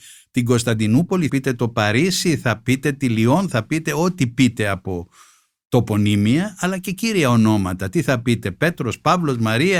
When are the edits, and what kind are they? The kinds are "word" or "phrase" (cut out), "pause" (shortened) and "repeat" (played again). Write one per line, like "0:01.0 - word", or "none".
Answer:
0:01.3 - word